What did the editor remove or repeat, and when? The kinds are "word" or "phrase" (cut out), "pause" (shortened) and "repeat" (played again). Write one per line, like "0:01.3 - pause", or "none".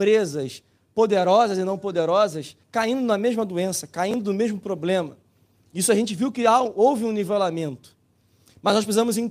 0:02.6 - pause